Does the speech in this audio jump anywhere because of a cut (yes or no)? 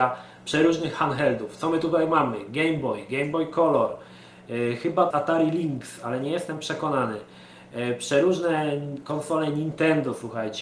yes